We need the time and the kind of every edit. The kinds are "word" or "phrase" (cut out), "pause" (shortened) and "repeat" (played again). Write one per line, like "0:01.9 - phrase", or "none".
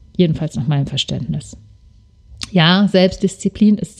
none